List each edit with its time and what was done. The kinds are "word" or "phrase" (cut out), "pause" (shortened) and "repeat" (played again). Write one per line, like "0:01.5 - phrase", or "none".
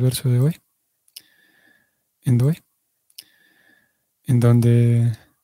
0:02.4 - repeat